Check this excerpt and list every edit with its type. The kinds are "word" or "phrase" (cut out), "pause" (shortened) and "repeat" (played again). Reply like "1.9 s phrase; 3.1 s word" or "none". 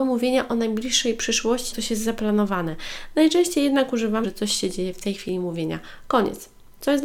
1.7 s word; 4.2 s phrase